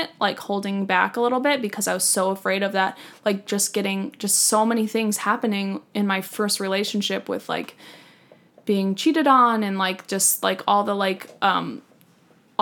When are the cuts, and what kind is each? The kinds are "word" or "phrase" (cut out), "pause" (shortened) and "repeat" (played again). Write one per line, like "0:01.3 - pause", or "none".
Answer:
none